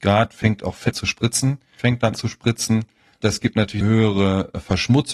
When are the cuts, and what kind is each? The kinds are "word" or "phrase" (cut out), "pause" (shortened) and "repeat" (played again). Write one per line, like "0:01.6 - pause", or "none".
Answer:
0:00.9 - word
0:01.8 - word
0:02.1 - word
0:03.2 - word
0:03.8 - word